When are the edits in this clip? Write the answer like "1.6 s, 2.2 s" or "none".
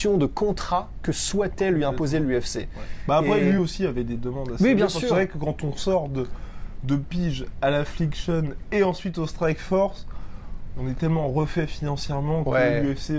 none